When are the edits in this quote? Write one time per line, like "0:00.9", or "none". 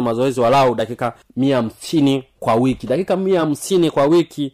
none